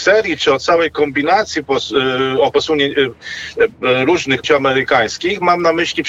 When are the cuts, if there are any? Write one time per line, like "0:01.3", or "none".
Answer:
0:02.5
0:04.4